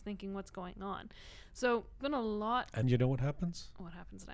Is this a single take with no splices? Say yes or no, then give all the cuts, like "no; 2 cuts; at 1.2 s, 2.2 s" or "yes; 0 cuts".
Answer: no; 2 cuts; at 2.0 s, 2.8 s